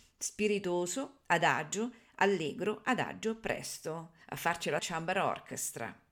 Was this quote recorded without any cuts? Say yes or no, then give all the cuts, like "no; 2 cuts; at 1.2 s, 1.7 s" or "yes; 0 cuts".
no; 2 cuts; at 4.2 s, 4.8 s